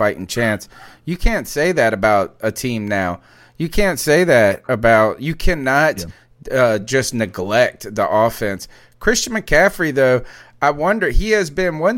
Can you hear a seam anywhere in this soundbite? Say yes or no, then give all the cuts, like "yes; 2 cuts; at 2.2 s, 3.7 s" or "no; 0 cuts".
no; 0 cuts